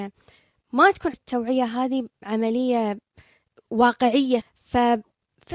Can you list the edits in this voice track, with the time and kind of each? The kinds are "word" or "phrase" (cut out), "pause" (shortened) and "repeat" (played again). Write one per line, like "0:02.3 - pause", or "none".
0:01.1 - word
0:04.4 - word